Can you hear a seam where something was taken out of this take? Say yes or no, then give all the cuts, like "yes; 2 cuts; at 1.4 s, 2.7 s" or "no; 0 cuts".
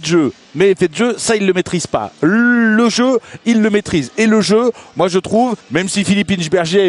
yes; 1 cut; at 5.6 s